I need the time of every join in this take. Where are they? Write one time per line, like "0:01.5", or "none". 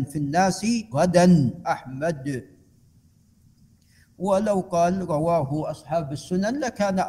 0:00.9
0:01.6